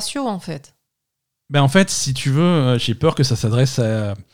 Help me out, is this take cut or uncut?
uncut